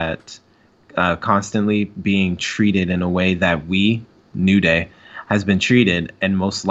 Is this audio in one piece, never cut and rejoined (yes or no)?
yes